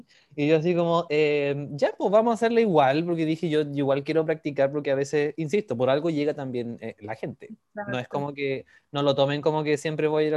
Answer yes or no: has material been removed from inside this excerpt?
no